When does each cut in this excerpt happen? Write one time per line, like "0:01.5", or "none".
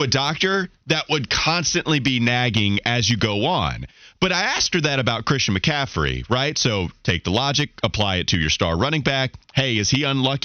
none